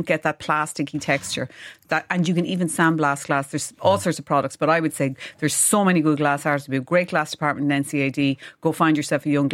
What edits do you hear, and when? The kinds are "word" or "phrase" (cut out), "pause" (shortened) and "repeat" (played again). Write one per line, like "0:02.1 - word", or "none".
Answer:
none